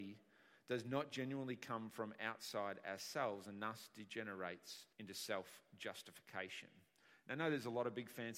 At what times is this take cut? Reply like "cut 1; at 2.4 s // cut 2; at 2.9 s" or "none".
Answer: cut 1; at 4.9 s